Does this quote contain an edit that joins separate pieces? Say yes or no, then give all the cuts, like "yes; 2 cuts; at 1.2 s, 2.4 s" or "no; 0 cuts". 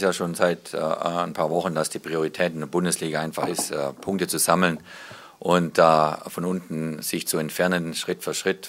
no; 0 cuts